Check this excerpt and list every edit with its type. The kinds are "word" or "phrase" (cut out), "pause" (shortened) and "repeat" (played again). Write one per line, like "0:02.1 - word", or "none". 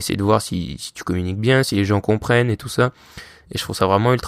none